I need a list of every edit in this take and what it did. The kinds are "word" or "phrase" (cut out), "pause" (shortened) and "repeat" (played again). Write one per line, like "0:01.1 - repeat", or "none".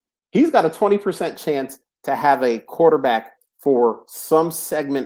none

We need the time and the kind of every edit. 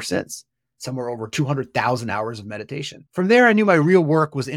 0:03.1 - pause

